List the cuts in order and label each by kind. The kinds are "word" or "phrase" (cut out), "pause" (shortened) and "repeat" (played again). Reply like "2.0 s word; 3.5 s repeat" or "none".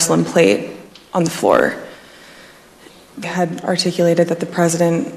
3.2 s word